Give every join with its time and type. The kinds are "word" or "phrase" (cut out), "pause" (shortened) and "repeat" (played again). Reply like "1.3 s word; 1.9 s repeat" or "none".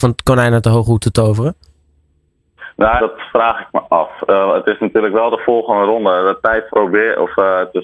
3.0 s word; 6.7 s word